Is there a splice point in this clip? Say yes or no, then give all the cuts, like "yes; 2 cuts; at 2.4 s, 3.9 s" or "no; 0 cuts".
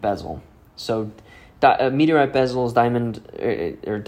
no; 0 cuts